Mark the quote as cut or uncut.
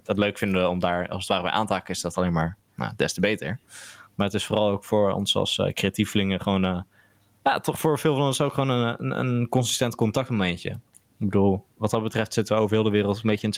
uncut